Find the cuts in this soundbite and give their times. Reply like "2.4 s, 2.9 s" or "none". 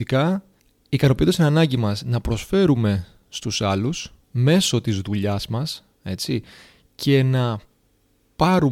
4.2 s, 6.0 s